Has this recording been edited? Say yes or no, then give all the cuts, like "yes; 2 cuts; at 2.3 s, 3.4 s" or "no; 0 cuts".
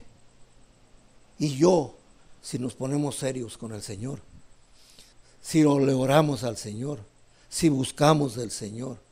yes; 1 cut; at 5.1 s